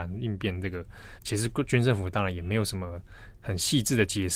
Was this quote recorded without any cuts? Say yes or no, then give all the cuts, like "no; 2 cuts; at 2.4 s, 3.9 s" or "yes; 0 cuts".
no; 1 cut; at 1.2 s